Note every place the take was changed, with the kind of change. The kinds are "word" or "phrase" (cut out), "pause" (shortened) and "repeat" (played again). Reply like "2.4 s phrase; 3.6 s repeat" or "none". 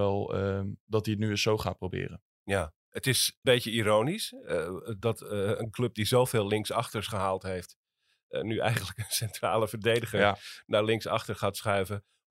2.8 s pause; 3.4 s word